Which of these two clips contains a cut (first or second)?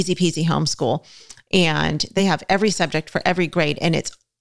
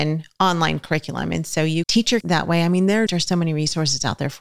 second